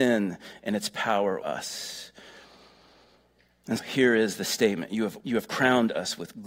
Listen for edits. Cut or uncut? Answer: cut